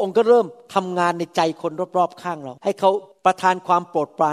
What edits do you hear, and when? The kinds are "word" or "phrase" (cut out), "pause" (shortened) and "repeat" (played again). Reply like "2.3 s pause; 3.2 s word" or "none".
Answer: 2.6 s pause; 3.1 s pause